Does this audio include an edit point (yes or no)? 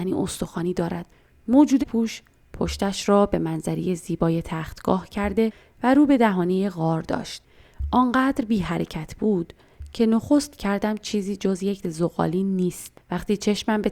yes